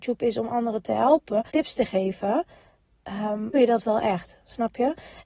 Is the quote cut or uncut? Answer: cut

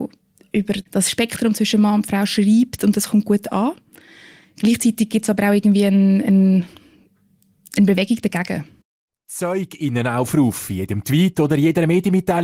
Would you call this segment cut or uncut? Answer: uncut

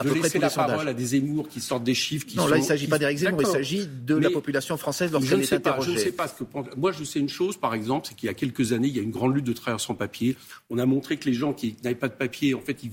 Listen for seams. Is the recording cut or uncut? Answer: uncut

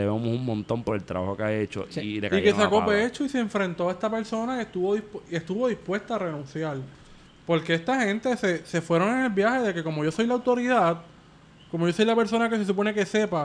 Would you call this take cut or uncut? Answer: uncut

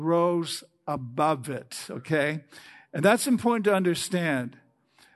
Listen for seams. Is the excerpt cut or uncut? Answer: uncut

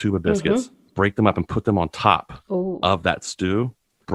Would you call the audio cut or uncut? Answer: uncut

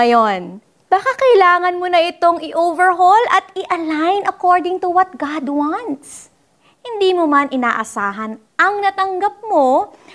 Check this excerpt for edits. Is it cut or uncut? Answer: uncut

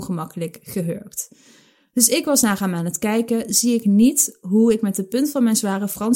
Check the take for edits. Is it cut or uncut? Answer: uncut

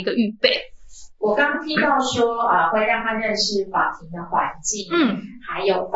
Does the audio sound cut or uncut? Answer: uncut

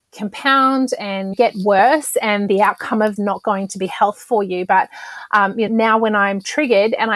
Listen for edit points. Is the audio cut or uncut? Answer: cut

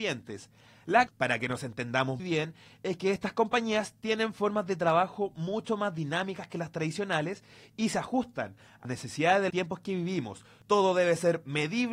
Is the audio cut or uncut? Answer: cut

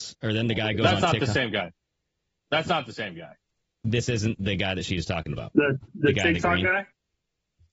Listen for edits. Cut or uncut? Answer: uncut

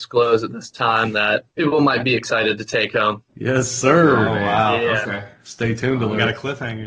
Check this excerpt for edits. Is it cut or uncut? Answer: cut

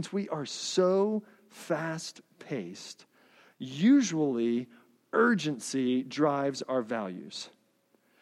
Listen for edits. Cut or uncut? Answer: uncut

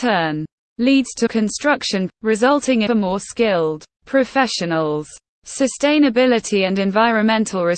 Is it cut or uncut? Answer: cut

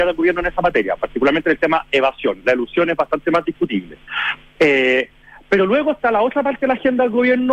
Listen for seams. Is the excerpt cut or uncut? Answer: uncut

